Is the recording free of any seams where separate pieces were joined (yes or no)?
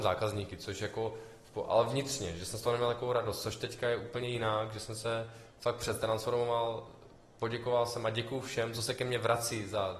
yes